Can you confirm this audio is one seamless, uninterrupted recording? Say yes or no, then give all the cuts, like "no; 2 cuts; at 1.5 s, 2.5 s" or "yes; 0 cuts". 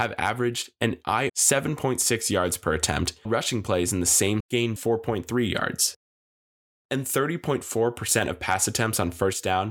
no; 4 cuts; at 1.3 s, 3.2 s, 4.4 s, 4.8 s